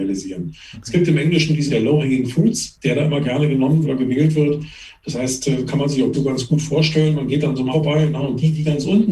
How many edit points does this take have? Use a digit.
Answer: 4